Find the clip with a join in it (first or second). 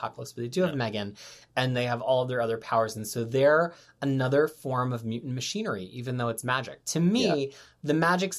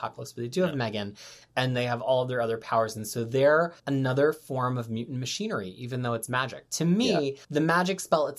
second